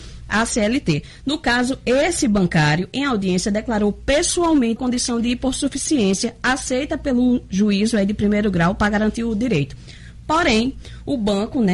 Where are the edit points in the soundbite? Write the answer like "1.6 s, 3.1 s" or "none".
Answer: 4.8 s